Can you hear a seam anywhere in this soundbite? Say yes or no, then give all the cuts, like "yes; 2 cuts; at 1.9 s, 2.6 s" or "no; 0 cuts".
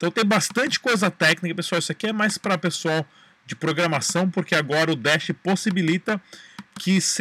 no; 0 cuts